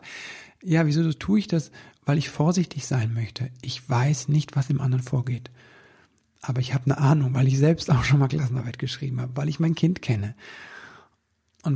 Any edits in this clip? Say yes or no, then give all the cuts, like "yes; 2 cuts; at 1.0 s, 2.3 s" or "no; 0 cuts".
no; 0 cuts